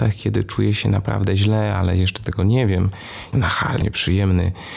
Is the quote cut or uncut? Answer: cut